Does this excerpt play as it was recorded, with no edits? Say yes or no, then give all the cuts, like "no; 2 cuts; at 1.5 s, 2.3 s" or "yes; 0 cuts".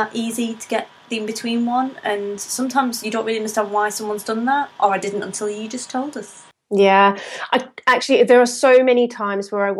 yes; 0 cuts